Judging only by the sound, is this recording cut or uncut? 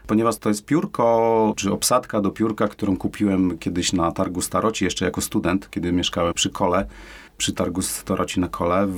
cut